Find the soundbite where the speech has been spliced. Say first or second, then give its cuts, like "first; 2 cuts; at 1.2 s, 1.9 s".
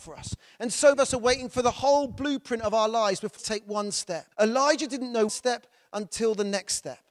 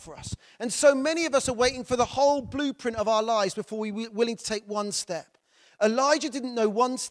first; 4 cuts; at 0.9 s, 3.4 s, 4.3 s, 5.3 s